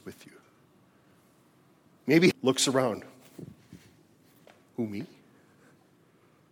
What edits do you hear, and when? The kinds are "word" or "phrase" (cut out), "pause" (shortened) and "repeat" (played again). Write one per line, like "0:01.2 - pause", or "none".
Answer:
0:02.3 - word